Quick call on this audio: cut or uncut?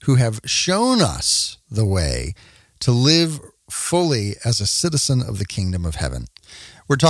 uncut